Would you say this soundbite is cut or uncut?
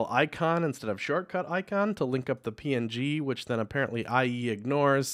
uncut